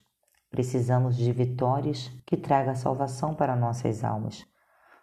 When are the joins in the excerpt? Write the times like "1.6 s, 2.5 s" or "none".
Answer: 2.2 s